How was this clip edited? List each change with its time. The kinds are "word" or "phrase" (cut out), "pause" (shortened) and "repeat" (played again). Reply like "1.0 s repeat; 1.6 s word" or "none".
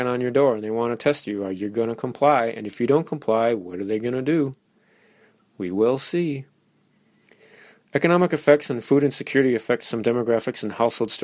none